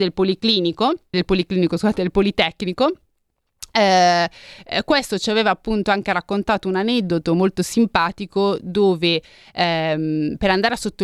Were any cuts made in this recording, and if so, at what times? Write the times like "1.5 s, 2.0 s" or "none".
1.1 s